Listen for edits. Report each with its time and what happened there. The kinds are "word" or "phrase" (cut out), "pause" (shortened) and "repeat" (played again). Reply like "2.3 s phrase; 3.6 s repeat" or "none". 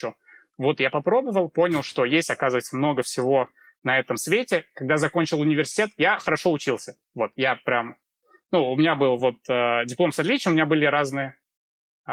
none